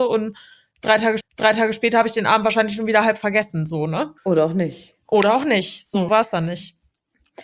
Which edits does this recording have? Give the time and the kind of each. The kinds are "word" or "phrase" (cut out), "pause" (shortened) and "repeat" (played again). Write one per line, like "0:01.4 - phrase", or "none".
0:01.2 - repeat
0:04.2 - pause
0:06.1 - word